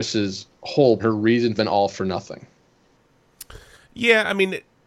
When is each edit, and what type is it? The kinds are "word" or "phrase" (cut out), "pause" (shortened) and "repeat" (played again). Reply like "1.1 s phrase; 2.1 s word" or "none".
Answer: 1.0 s word; 1.6 s phrase